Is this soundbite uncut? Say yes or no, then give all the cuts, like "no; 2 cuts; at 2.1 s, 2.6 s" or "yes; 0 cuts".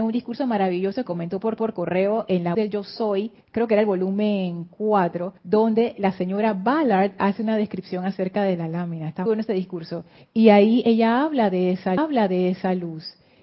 no; 8 cuts; at 1.1 s, 1.6 s, 2.5 s, 3.4 s, 5.4 s, 9.3 s, 10.2 s, 12.0 s